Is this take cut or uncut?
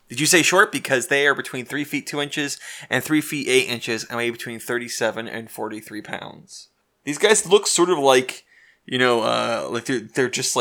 uncut